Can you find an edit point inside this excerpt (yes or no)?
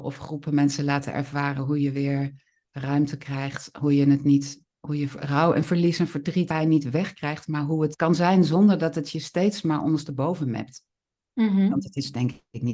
yes